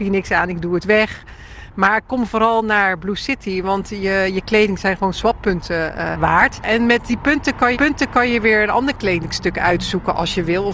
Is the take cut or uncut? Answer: cut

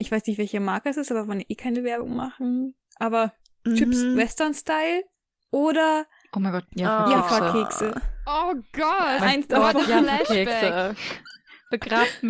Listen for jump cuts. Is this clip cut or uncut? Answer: cut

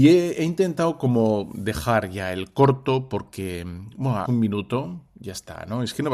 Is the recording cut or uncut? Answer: cut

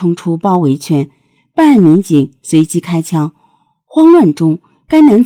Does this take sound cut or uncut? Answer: uncut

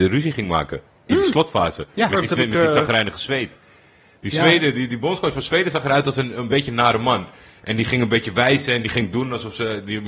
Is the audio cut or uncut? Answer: uncut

